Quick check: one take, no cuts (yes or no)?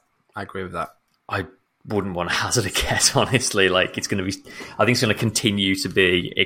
yes